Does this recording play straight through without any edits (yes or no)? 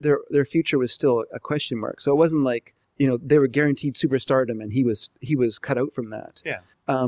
yes